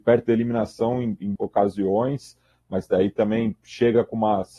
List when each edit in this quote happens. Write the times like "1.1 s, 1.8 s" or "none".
1.4 s

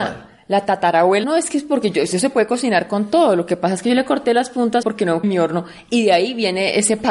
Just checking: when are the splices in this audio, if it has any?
1.2 s, 4.8 s, 5.2 s

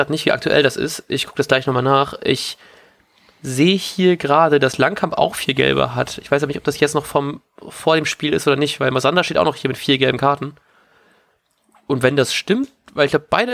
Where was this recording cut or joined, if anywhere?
none

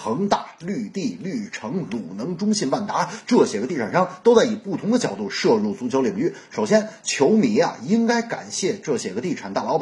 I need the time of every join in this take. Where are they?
none

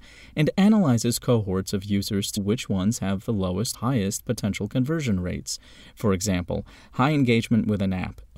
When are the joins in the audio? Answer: 2.4 s, 3.7 s

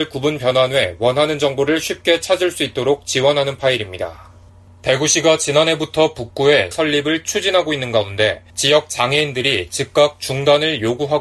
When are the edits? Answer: 4.5 s, 6.7 s, 8.5 s

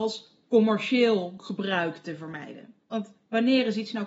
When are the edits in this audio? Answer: 2.8 s

